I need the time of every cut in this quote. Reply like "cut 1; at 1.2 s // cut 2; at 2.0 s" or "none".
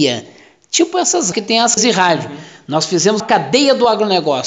cut 1; at 1.3 s // cut 2; at 1.8 s // cut 3; at 3.2 s